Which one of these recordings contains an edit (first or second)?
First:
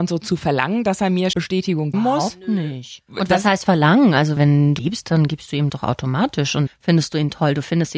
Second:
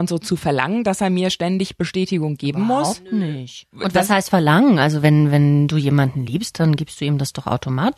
first